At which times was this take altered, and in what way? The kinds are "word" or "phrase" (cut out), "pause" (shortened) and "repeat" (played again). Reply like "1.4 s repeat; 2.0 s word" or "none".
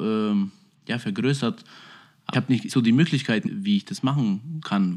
2.3 s word; 2.7 s word; 3.5 s word